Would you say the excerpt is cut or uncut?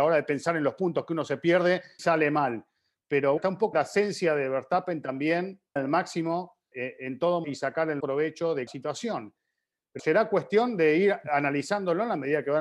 cut